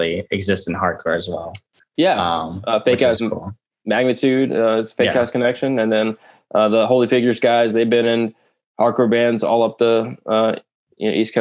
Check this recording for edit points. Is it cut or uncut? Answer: cut